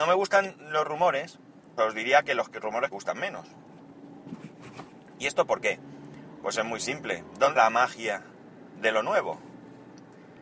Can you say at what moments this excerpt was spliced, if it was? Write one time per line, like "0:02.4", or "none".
0:01.8
0:02.9
0:07.6

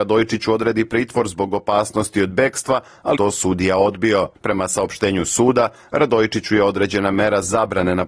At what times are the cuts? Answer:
0:03.2
0:04.3

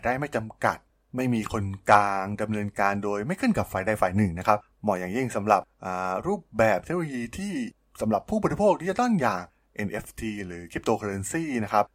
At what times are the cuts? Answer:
none

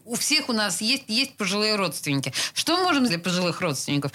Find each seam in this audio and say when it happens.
0:01.1
0:03.1

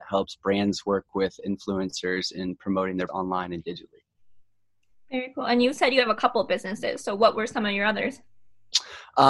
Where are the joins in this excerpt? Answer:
0:03.1

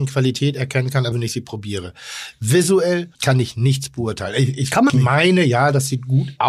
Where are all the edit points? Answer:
0:01.1
0:03.1
0:04.9

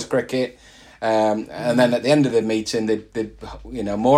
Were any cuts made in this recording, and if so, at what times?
none

